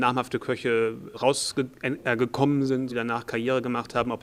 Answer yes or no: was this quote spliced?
yes